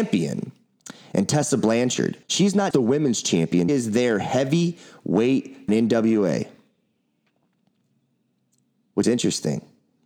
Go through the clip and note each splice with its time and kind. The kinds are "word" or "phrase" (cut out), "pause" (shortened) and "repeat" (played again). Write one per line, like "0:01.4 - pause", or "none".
0:02.2 - pause
0:02.7 - word
0:03.7 - word
0:05.7 - phrase
0:09.0 - word